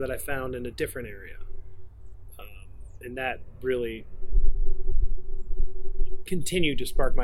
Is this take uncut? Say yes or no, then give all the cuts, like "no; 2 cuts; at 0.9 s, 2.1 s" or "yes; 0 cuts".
yes; 0 cuts